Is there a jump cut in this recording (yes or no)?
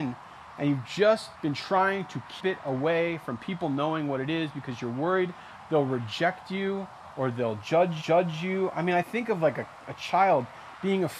yes